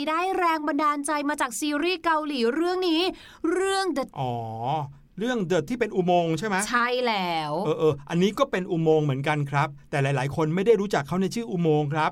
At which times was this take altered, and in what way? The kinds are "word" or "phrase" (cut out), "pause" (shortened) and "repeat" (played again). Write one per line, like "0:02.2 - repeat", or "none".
0:04.1 - word
0:05.7 - word